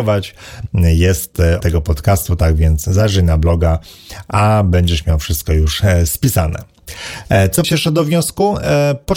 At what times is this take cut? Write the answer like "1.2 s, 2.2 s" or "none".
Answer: 1.6 s, 7.6 s